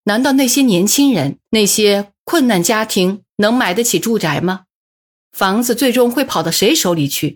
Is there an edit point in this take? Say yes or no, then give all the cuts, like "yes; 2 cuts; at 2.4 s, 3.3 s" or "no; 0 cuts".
yes; 1 cut; at 1.4 s